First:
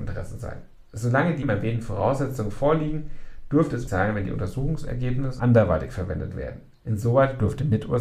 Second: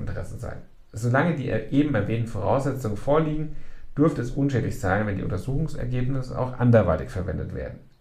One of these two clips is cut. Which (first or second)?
first